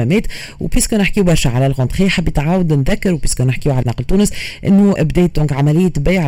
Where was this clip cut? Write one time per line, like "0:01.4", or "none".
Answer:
0:03.8
0:05.0